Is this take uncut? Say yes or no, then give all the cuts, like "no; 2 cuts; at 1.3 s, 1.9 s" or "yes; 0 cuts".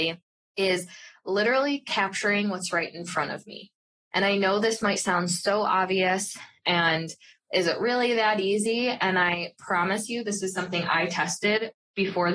yes; 0 cuts